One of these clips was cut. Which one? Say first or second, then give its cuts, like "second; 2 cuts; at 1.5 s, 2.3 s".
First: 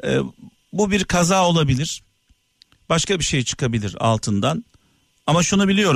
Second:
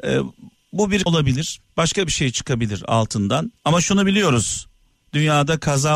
second; 3 cuts; at 1.1 s, 1.7 s, 3.6 s